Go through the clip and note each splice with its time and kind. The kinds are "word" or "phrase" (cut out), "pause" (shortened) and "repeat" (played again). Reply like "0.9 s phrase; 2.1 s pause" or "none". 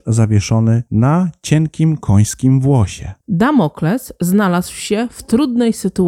3.2 s pause